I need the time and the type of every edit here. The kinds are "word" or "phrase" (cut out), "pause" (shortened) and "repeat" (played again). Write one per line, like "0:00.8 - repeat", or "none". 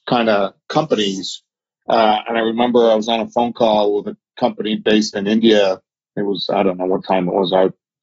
none